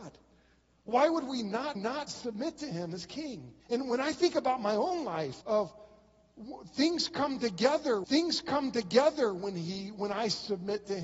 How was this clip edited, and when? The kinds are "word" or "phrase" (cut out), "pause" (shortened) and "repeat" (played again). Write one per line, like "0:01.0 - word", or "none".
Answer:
0:01.8 - repeat
0:03.6 - pause
0:05.4 - word
0:08.0 - repeat

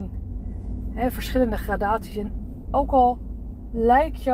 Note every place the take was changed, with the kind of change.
none

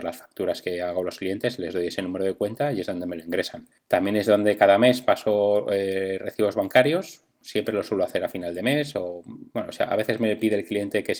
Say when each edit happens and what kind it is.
0:09.5 - pause

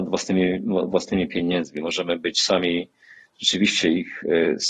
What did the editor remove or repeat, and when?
none

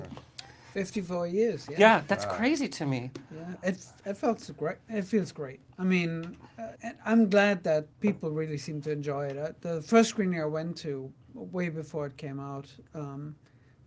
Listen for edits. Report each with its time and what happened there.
0:06.8 - pause
0:07.9 - pause

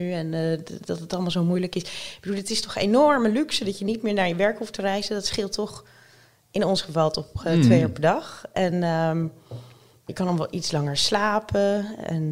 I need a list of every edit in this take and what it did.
0:10.1 - word

